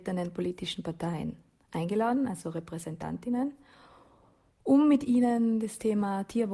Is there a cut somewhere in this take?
no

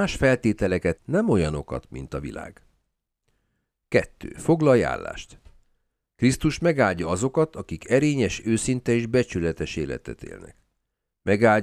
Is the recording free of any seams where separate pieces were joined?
no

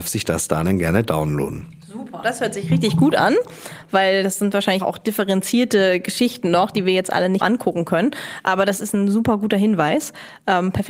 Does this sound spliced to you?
yes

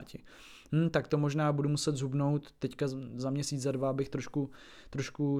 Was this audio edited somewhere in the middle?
no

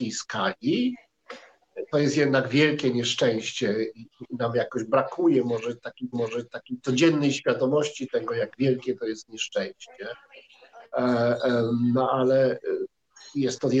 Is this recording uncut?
no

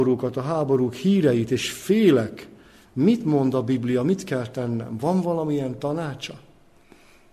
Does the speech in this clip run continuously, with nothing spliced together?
yes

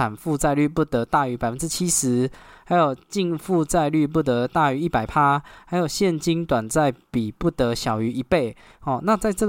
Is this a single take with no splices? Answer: yes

